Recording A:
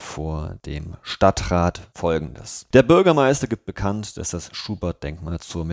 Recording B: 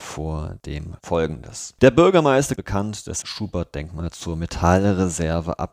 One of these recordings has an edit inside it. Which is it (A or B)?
B